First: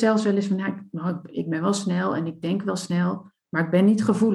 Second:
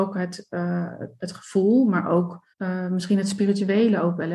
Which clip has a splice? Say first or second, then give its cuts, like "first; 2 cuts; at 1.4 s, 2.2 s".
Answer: second; 1 cut; at 2.5 s